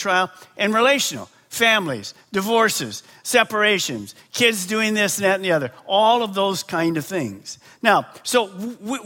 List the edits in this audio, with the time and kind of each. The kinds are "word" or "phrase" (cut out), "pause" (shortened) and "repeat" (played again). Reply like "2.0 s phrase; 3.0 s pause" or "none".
none